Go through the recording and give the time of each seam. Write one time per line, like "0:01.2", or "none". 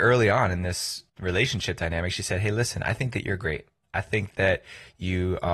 0:01.1